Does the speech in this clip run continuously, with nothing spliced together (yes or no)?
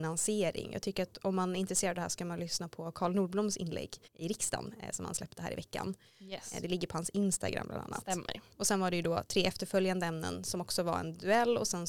no